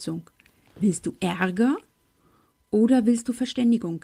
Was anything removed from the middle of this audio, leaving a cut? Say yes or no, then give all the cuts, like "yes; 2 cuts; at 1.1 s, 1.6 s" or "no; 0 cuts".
no; 0 cuts